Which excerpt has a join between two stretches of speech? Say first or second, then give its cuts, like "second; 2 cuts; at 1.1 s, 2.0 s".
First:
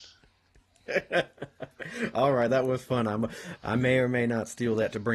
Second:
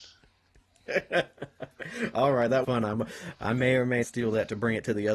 second; 2 cuts; at 2.6 s, 4.0 s